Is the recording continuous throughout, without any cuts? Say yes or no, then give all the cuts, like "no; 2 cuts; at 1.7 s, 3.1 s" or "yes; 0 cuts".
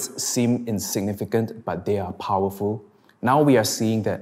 yes; 0 cuts